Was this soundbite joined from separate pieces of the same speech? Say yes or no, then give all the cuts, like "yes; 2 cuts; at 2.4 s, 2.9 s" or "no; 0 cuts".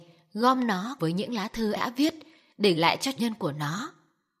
yes; 4 cuts; at 1.0 s, 1.7 s, 2.8 s, 3.2 s